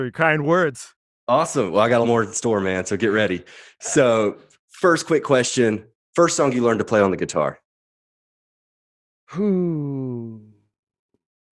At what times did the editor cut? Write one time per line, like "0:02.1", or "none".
0:02.0